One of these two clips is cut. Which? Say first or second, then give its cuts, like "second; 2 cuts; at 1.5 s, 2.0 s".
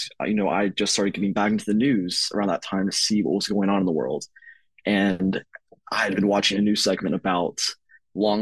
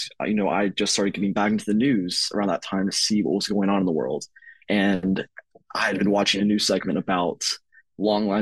second; 1 cut; at 4.6 s